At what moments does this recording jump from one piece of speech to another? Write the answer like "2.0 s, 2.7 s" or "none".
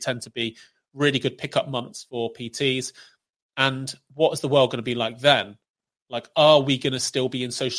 none